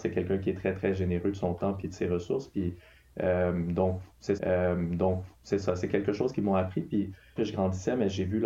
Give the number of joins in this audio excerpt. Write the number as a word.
two